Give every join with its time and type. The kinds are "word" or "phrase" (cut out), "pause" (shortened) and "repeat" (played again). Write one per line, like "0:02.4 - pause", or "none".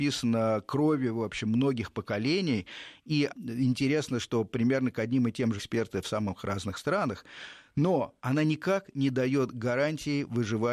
0:03.3 - word
0:04.2 - word
0:05.6 - phrase